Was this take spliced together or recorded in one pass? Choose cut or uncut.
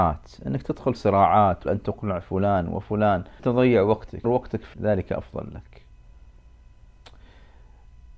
cut